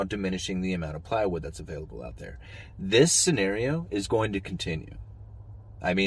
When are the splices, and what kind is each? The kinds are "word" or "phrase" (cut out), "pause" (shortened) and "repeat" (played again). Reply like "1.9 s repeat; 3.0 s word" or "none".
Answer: none